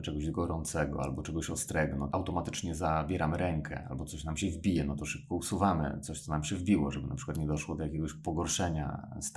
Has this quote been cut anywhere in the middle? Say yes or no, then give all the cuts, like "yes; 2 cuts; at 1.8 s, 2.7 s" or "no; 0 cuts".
yes; 1 cut; at 2.1 s